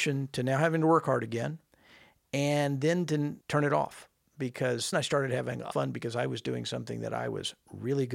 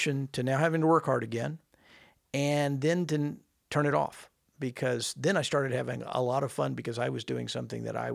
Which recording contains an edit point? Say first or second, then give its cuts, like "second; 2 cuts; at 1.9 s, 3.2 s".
first; 3 cuts; at 3.4 s, 4.9 s, 5.7 s